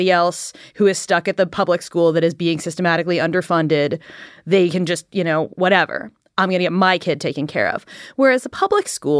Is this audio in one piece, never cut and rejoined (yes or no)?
yes